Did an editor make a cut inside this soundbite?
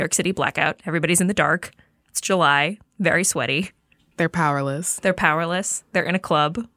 no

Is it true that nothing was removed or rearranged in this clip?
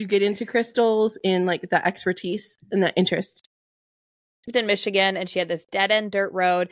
yes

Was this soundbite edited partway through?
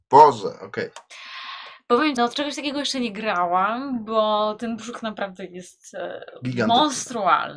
yes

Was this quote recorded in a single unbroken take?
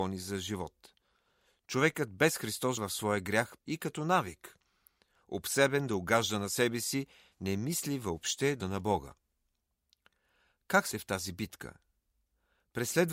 no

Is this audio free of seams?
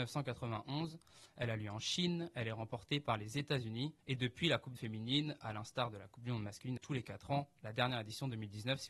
no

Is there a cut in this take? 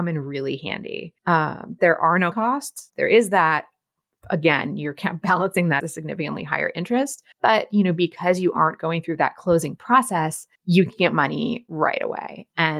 yes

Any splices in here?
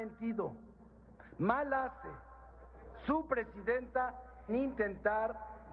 yes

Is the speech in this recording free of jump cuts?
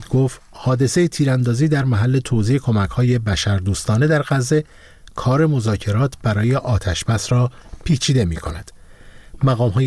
yes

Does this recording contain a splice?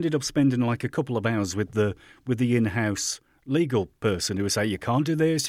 no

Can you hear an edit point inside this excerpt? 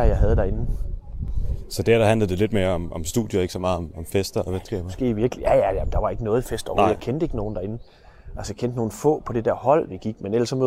no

